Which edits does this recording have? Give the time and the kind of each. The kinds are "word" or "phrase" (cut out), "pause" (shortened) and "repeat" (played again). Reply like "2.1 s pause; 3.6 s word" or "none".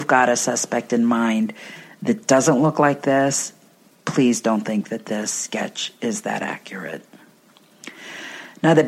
none